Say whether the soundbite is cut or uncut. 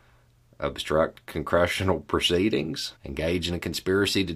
cut